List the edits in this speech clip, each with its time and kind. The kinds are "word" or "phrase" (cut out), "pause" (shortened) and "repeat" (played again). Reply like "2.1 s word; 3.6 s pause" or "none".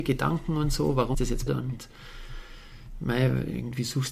1.1 s word; 1.5 s word